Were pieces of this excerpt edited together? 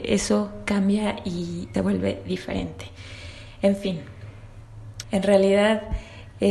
yes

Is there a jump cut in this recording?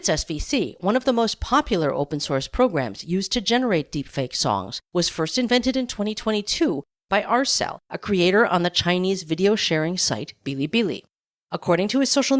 yes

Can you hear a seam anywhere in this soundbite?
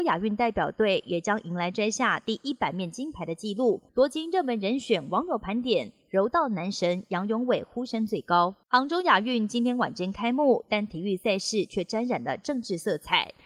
yes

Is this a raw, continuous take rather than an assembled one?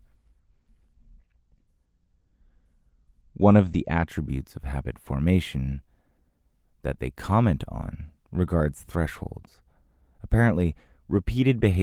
yes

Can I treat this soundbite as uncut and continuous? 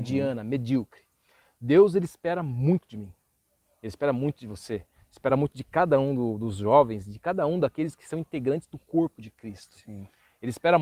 yes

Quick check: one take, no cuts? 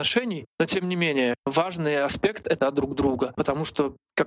no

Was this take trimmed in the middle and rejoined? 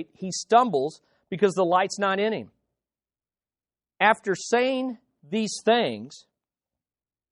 no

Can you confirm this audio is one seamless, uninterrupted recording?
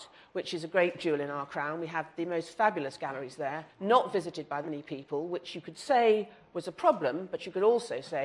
no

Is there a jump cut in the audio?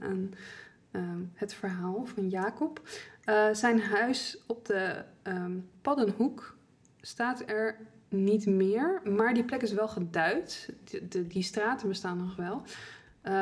no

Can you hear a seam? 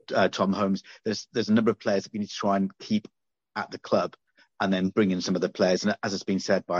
no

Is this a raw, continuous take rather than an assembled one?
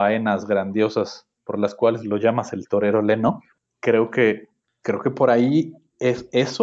yes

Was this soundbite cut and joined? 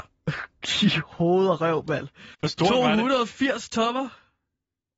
yes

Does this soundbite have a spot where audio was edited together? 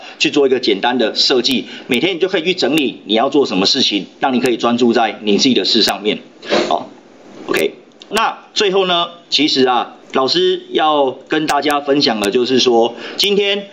yes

